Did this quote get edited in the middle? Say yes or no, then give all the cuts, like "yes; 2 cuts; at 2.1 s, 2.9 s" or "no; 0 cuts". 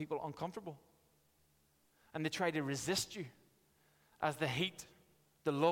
no; 0 cuts